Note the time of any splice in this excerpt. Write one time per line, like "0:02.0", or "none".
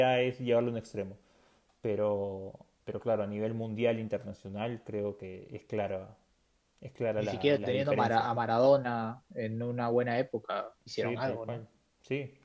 0:10.8